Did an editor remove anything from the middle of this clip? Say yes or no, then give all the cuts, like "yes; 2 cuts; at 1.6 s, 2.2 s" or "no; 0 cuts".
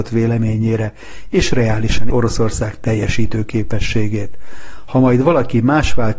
yes; 1 cut; at 2.1 s